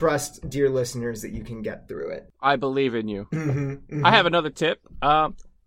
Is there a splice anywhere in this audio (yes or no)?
no